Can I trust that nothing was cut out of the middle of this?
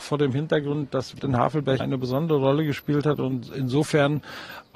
no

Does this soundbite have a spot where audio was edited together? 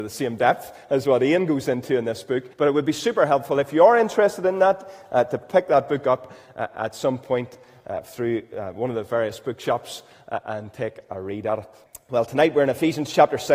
yes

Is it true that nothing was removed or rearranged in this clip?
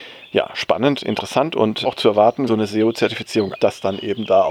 no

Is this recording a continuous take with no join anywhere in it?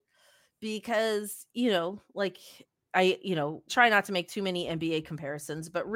no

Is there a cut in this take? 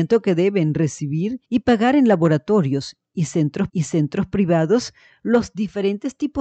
yes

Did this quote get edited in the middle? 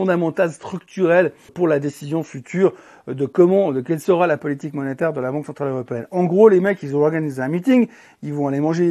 yes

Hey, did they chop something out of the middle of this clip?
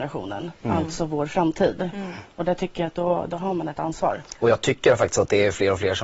no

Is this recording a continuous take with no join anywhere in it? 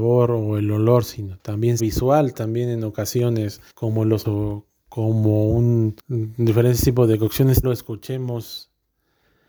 no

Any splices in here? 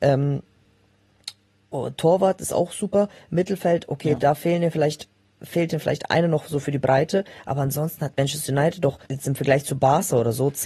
yes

